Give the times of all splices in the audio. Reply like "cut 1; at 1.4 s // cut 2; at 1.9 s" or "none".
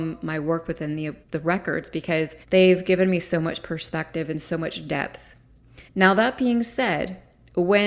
cut 1; at 1.2 s // cut 2; at 2.4 s // cut 3; at 5.9 s